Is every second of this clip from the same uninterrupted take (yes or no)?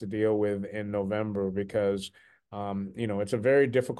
yes